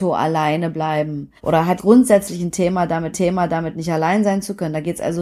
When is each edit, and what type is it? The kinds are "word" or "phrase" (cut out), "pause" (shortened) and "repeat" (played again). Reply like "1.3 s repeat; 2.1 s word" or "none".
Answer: 1.4 s pause; 1.8 s phrase; 3.1 s repeat